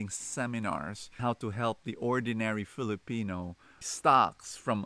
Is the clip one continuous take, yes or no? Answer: no